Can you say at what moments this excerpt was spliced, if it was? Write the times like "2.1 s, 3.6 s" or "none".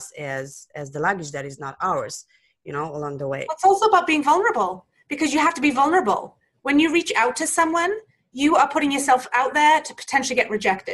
none